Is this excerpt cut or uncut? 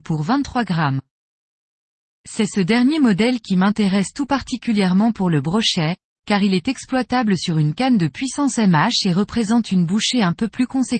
uncut